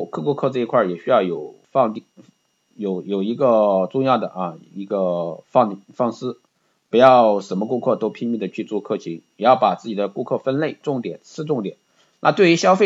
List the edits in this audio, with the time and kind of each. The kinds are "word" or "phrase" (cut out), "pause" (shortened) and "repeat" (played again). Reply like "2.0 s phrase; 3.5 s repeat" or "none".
1.6 s pause